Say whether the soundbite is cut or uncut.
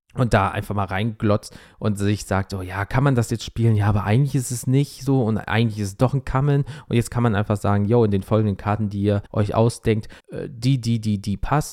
cut